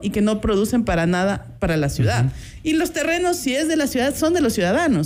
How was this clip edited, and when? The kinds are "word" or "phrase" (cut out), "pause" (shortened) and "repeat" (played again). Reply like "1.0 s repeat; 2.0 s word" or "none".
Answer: none